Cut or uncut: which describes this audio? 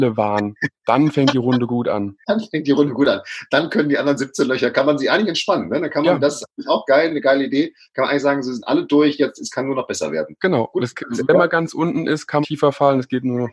cut